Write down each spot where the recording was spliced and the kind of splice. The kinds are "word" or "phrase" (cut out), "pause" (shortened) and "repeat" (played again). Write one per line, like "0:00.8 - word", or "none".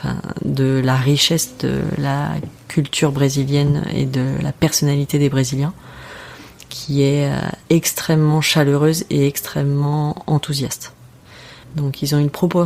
0:07.6 - pause
0:11.6 - pause